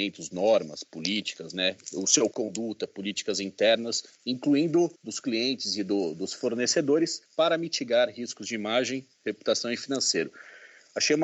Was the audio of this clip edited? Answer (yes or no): yes